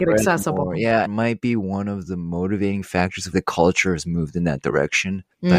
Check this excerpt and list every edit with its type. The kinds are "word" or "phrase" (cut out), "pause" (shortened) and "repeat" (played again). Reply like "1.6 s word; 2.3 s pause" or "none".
1.0 s phrase; 3.3 s word